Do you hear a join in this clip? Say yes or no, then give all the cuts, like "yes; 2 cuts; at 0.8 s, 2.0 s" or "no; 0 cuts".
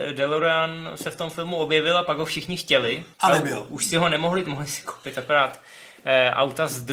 yes; 2 cuts; at 3.1 s, 4.4 s